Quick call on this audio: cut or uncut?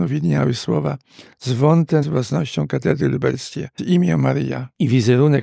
cut